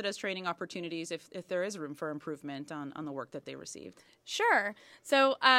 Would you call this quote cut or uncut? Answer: uncut